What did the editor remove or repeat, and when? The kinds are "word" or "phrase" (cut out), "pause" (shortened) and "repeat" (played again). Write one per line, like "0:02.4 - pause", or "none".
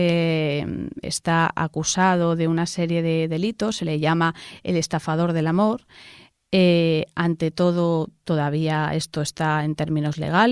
none